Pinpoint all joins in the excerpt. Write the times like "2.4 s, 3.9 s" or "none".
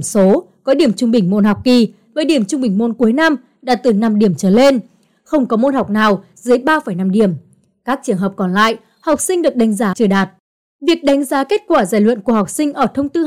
9.9 s